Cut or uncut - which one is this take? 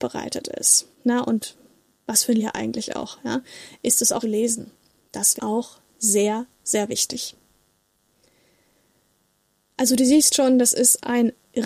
cut